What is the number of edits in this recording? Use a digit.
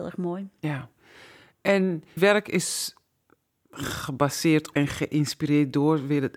2